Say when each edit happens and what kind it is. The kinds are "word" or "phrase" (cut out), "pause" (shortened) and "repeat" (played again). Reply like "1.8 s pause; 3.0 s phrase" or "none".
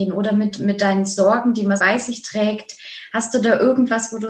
1.8 s word